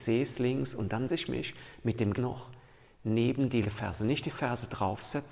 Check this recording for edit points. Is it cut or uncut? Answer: cut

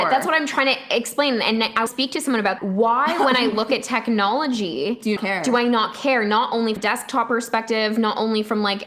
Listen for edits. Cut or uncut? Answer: cut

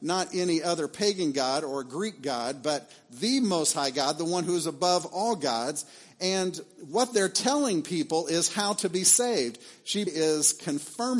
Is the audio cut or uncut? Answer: cut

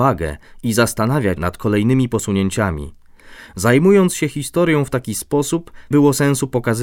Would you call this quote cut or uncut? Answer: cut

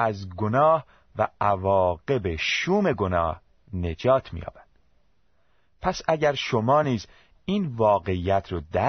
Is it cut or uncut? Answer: uncut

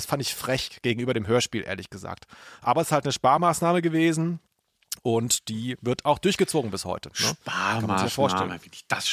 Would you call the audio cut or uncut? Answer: uncut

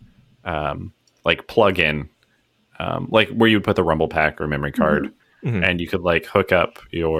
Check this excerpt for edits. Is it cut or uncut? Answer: uncut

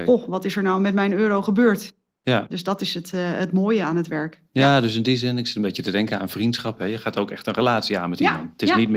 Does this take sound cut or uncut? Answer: uncut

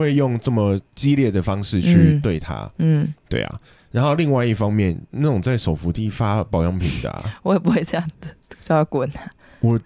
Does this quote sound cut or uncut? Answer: uncut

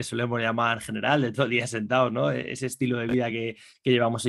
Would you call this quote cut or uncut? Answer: uncut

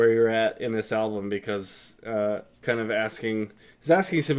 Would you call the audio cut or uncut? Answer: cut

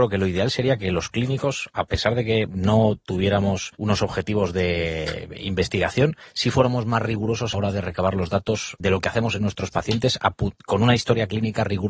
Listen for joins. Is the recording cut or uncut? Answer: cut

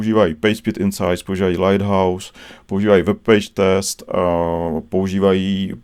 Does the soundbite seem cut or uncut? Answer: uncut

